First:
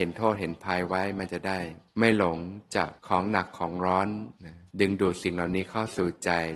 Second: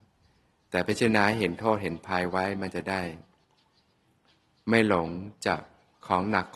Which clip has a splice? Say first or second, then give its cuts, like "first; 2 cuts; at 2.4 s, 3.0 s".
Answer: first; 4 cuts; at 1.9 s, 3.0 s, 4.4 s, 4.7 s